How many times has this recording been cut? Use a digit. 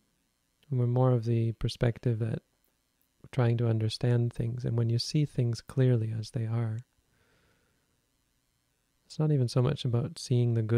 0